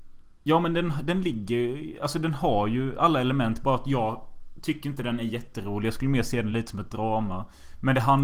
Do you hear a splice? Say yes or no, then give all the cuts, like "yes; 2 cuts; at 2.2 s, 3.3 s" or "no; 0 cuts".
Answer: no; 0 cuts